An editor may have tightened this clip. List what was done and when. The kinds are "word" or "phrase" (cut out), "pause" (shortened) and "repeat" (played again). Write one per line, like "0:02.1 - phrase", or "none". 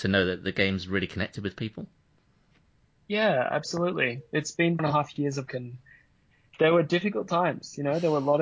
0:04.8 - word
0:05.5 - word
0:06.5 - word